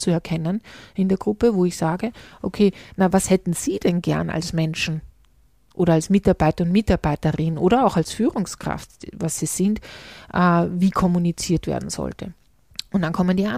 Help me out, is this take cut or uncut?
uncut